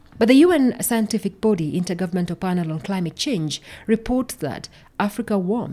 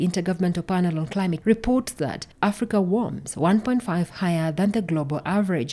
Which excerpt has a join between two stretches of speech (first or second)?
second